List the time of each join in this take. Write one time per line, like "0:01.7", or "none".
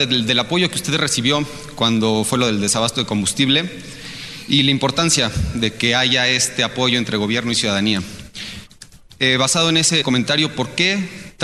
0:10.0